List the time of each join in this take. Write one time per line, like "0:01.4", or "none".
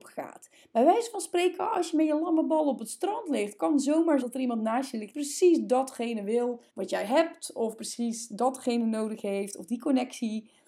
0:04.2
0:05.1
0:06.7

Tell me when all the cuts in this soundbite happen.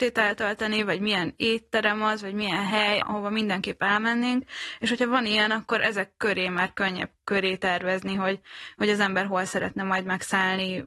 0:03.0

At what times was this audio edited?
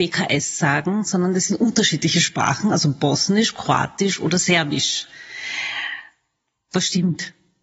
none

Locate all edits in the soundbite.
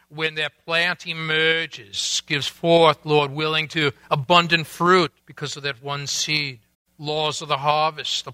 0:05.2
0:06.7

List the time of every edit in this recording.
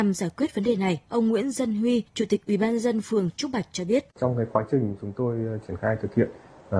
0:01.1
0:02.1
0:04.1

